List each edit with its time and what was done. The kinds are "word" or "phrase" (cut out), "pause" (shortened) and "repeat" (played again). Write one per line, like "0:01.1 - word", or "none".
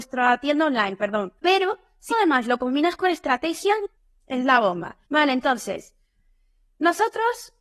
0:01.4 - pause
0:02.1 - word
0:04.0 - pause
0:05.0 - pause